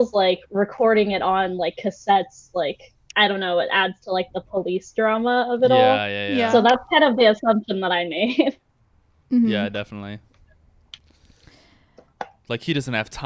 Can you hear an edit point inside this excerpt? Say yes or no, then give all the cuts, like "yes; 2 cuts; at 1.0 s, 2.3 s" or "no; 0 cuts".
no; 0 cuts